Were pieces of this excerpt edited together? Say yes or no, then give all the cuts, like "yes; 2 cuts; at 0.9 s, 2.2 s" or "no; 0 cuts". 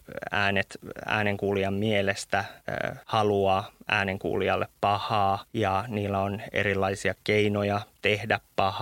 no; 0 cuts